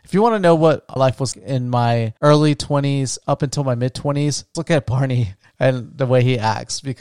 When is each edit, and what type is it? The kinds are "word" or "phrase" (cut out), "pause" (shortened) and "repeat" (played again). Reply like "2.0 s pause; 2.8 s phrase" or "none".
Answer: 1.0 s word; 1.3 s word; 2.2 s pause; 4.5 s word; 5.5 s pause